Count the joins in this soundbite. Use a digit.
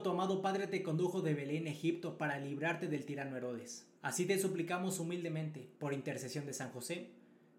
2